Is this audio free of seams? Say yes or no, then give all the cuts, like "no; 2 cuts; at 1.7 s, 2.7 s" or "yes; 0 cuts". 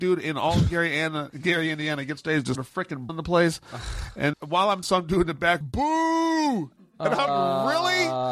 no; 7 cuts; at 2.2 s, 2.6 s, 3.1 s, 4.3 s, 4.8 s, 5.6 s, 7.3 s